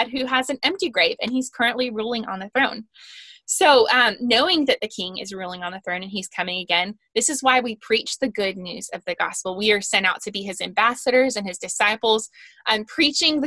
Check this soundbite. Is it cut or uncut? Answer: uncut